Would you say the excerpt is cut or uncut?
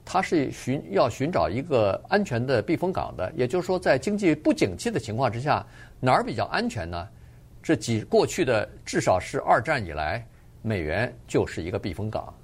uncut